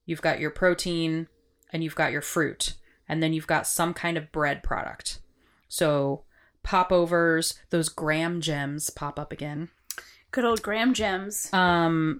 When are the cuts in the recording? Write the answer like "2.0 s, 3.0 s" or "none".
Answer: none